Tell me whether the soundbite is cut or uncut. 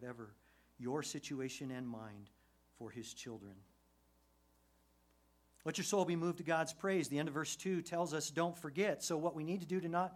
uncut